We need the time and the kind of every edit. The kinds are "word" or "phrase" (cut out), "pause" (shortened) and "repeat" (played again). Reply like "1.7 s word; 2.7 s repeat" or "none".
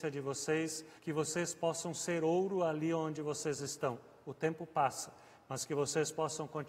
1.0 s pause